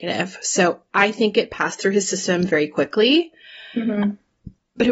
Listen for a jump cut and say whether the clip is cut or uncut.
uncut